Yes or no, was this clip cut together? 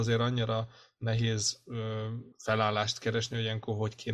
yes